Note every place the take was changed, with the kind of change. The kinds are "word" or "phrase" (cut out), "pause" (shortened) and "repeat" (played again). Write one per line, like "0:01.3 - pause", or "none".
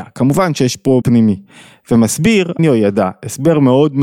0:01.0 - word
0:02.6 - word